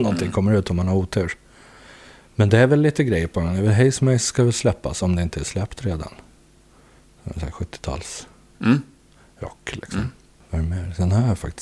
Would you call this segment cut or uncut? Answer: uncut